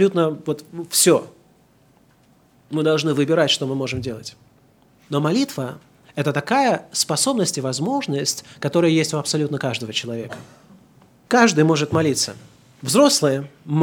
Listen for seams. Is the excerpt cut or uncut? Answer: uncut